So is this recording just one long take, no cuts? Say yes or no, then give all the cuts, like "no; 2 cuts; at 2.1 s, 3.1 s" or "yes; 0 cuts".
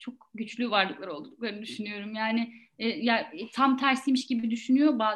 yes; 0 cuts